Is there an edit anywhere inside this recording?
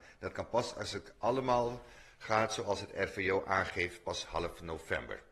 no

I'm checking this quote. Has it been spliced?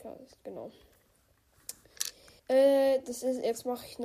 yes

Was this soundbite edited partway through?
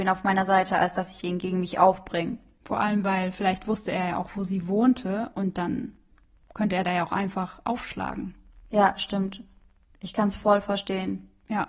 no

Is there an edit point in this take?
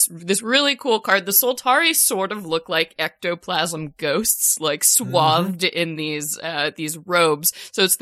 no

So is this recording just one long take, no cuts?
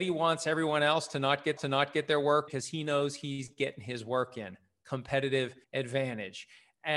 no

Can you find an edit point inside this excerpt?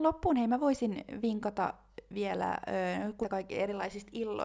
yes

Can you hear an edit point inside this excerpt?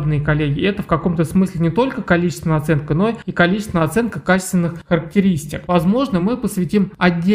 no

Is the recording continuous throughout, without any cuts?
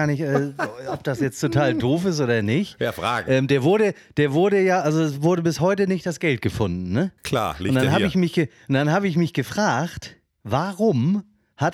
no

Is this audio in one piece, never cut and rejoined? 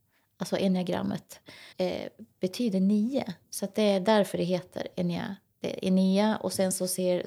no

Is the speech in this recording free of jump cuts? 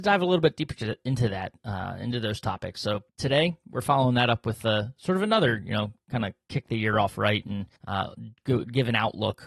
no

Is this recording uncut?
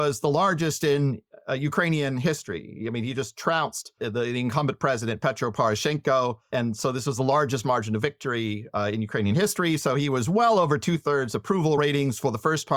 yes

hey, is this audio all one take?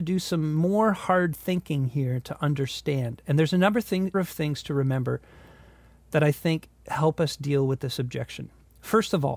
no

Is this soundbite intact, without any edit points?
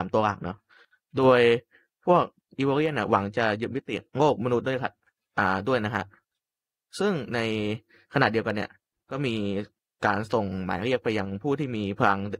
no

